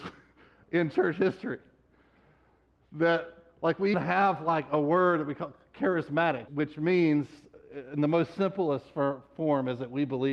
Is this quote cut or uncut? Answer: cut